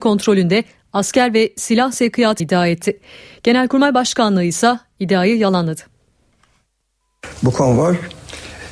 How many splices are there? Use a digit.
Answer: 1